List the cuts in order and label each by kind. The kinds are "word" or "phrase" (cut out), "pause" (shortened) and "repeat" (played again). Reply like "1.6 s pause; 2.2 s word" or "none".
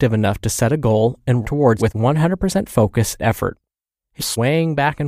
1.4 s word; 1.8 s word; 3.2 s word; 4.2 s word